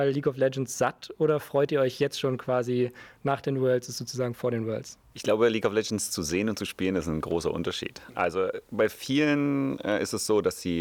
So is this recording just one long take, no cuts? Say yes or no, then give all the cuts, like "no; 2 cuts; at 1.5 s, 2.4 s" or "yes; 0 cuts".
yes; 0 cuts